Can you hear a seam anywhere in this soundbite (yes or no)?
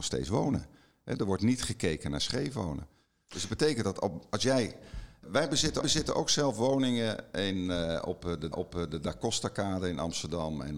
yes